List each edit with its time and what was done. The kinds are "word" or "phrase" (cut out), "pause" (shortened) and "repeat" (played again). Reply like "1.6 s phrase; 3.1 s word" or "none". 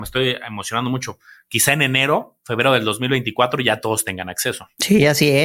none

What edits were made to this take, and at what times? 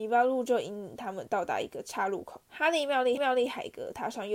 2.4 s pause; 3.2 s repeat

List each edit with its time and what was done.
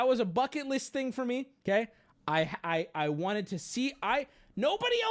1.6 s pause

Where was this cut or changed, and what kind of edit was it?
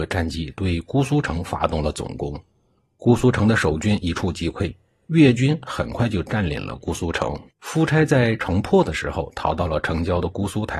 7.5 s pause

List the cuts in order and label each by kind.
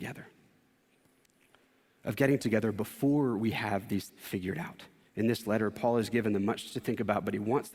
2.4 s word; 4.1 s word; 5.1 s pause; 6.7 s phrase

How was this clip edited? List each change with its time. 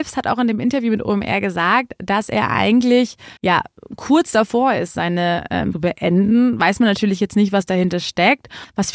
3.4 s pause; 5.7 s phrase

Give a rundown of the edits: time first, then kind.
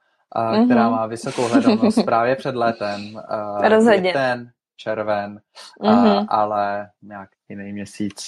7.3 s word

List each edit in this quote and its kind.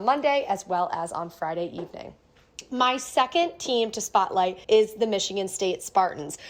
4.6 s pause

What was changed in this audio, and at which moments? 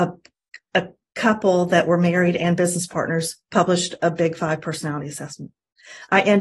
none

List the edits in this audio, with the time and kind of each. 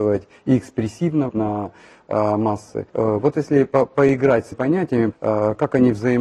1.3 s word; 2.9 s pause; 4.5 s word; 5.1 s word

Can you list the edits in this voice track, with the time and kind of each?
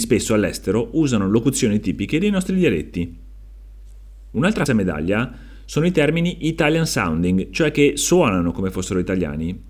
4.7 s phrase

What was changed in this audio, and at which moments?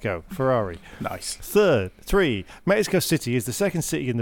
none

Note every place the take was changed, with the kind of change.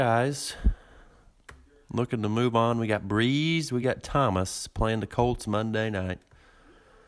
none

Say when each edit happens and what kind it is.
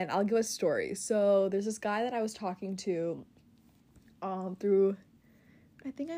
none

